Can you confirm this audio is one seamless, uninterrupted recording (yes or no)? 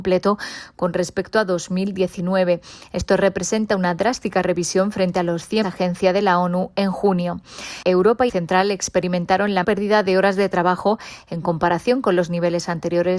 no